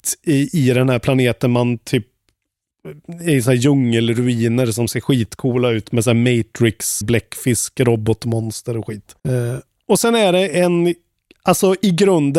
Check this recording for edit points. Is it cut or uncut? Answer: cut